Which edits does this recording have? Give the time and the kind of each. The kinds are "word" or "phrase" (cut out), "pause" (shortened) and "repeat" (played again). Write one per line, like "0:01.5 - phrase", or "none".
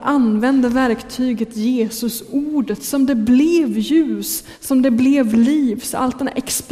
none

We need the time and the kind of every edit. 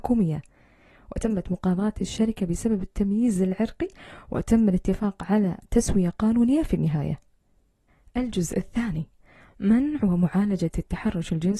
none

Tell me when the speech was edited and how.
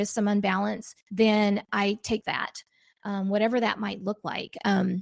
0:01.0 - pause
0:02.2 - phrase

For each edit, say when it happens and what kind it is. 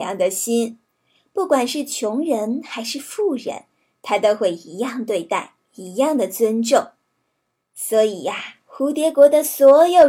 none

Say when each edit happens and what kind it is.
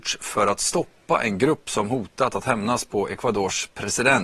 none

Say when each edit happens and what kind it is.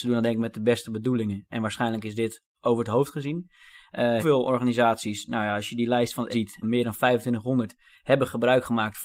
0:04.2 - word
0:06.3 - word
0:06.6 - word

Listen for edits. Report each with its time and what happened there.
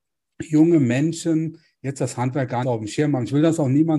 0:02.6 - word

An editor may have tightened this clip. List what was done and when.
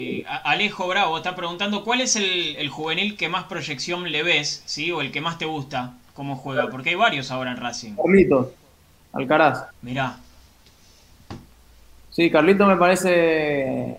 0:09.7 - pause

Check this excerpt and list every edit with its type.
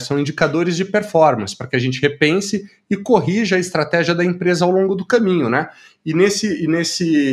none

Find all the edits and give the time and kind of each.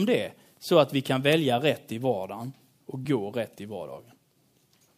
none

